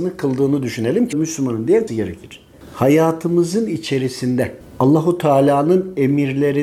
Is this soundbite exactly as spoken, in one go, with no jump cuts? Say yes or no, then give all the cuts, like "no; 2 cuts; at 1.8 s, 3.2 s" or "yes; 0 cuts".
no; 3 cuts; at 1.1 s, 1.9 s, 4.6 s